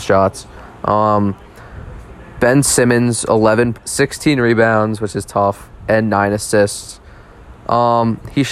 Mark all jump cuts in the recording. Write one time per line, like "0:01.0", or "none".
0:03.7